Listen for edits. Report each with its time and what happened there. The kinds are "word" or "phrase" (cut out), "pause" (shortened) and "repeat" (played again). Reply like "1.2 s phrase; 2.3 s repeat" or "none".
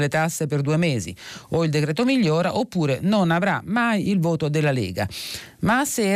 none